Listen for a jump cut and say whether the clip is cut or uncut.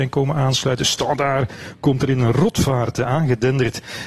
uncut